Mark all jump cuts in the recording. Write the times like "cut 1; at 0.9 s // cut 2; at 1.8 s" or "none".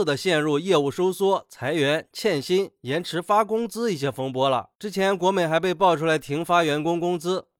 cut 1; at 4.7 s